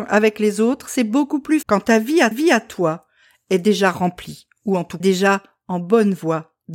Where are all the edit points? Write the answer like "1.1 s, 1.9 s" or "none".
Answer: 1.6 s, 2.3 s, 5.0 s